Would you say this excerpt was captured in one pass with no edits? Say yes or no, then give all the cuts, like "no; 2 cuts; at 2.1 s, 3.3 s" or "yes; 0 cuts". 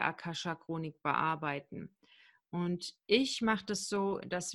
yes; 0 cuts